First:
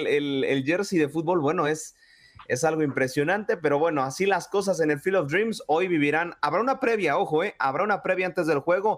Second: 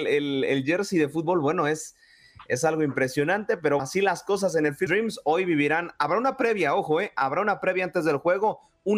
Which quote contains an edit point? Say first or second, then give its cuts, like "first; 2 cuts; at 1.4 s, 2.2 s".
second; 2 cuts; at 3.8 s, 4.9 s